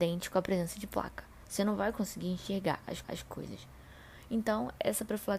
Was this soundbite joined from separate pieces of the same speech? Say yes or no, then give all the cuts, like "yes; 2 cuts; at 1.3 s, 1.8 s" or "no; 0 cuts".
yes; 1 cut; at 3.0 s